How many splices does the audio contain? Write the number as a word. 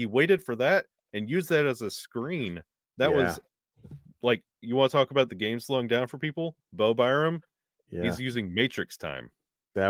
zero